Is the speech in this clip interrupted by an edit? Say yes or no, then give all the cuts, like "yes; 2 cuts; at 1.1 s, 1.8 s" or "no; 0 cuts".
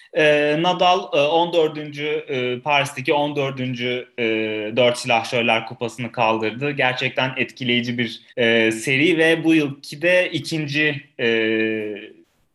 yes; 1 cut; at 8.3 s